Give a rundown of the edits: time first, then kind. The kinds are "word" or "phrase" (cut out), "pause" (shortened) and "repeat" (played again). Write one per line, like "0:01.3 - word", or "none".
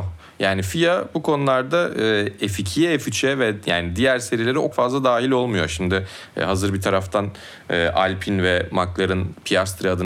0:04.7 - word